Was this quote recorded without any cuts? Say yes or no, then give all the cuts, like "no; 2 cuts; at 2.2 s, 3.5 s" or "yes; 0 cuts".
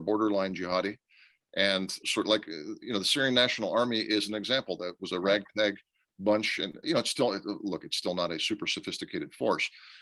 no; 2 cuts; at 2.0 s, 6.8 s